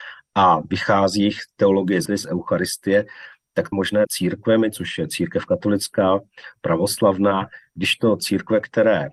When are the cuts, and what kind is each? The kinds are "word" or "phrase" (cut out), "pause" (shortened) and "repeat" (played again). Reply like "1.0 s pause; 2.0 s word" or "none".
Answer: 2.1 s word; 3.7 s word; 4.1 s word